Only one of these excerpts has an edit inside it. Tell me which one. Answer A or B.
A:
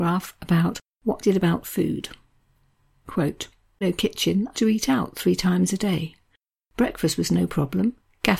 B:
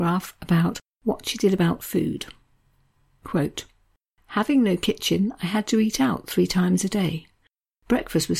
A